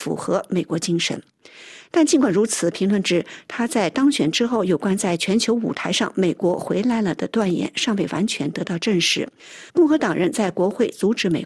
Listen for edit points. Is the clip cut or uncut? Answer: cut